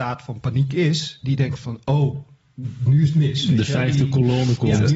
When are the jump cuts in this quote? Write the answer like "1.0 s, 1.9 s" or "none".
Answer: none